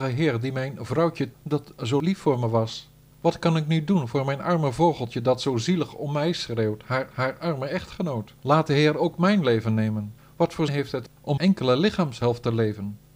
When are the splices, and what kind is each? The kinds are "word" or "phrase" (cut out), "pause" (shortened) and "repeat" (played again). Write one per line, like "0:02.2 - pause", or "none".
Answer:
0:01.3 - word
0:03.1 - pause
0:07.1 - repeat
0:08.4 - pause
0:10.2 - pause
0:10.7 - word
0:11.4 - word